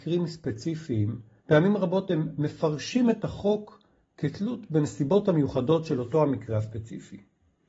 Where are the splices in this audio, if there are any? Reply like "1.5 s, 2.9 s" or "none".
1.4 s

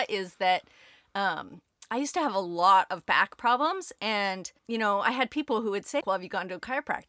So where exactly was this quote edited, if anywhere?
4.6 s, 6.0 s

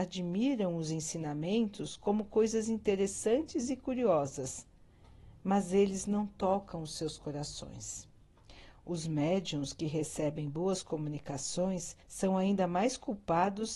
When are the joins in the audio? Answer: 12.0 s

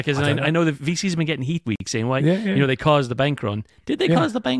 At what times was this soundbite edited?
1.6 s

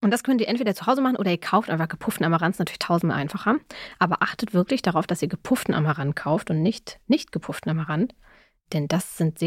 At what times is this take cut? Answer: none

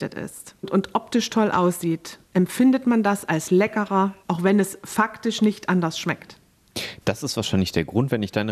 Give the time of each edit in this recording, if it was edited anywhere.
2.3 s, 4.2 s

